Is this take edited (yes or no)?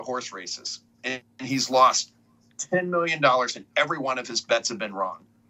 no